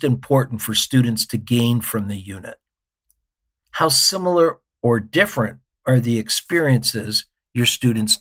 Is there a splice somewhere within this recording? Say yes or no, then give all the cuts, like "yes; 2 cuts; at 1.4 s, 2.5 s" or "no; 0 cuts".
no; 0 cuts